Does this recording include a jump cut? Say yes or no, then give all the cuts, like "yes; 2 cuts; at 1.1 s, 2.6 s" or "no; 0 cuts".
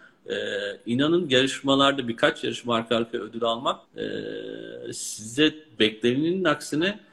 yes; 1 cut; at 3.8 s